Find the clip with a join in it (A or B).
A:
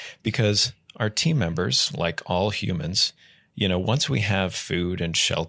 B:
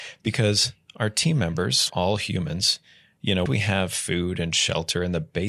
B